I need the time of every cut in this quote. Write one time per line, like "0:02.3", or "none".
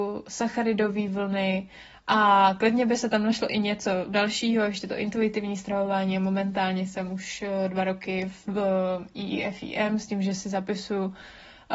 none